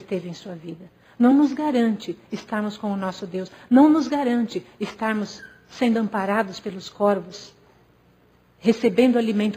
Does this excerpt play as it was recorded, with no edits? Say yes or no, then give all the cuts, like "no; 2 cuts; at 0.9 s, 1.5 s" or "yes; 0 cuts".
yes; 0 cuts